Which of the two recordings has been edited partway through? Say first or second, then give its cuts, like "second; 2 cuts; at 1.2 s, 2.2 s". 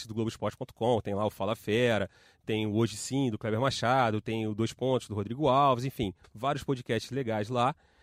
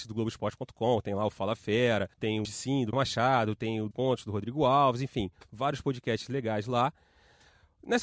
second; 4 cuts; at 2.1 s, 2.4 s, 2.9 s, 3.9 s